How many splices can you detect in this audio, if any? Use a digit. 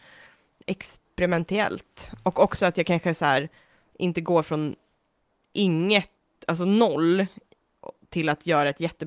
0